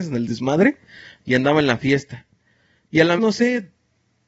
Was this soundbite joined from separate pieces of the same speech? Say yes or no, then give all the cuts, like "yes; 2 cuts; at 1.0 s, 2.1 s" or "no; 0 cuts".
yes; 1 cut; at 3.2 s